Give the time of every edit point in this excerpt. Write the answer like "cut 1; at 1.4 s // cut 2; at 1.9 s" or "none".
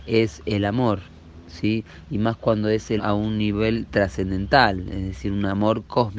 cut 1; at 3.0 s